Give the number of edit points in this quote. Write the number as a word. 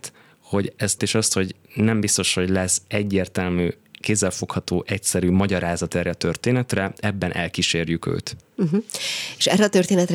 one